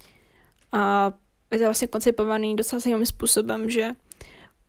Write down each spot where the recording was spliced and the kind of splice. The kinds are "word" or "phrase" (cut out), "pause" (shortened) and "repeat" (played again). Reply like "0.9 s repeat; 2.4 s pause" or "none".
none